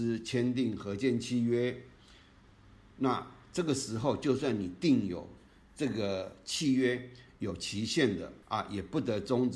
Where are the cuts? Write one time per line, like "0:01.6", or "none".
0:08.4